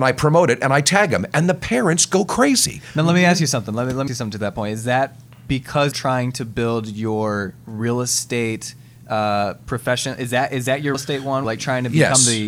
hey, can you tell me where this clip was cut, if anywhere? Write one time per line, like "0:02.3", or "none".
0:04.1
0:05.9
0:10.9
0:11.4